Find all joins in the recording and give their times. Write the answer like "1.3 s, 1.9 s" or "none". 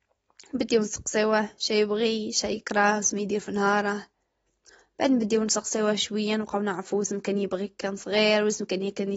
none

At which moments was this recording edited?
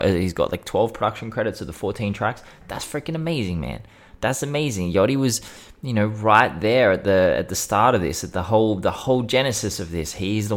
none

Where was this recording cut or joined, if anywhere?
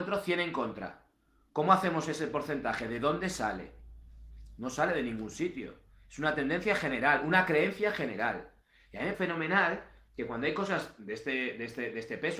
9.1 s

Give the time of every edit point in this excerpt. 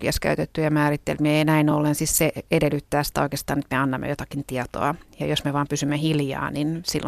none

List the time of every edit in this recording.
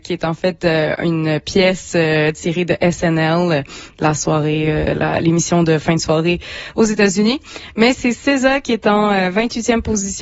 none

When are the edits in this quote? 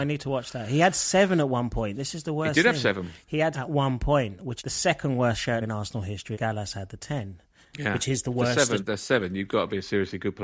3.5 s, 4.6 s, 5.6 s, 6.3 s, 7.6 s, 8.8 s

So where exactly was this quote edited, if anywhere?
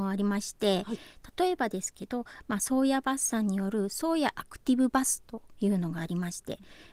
none

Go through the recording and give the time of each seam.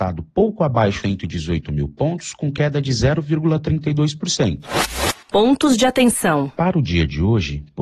1.0 s, 5.2 s

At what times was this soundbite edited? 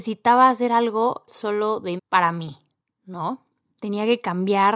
1.3 s, 2.0 s

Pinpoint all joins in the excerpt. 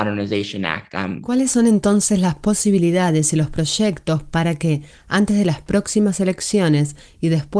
none

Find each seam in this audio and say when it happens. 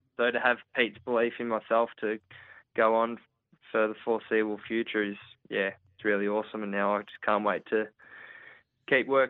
none

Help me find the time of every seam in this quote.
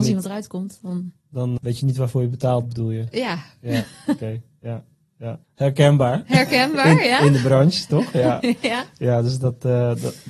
1.6 s, 5.4 s

